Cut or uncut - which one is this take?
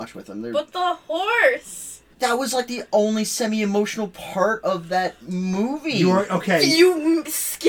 cut